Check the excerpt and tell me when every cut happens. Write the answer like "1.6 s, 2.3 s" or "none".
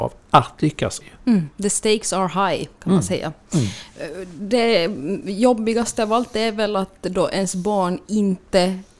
1.0 s, 1.5 s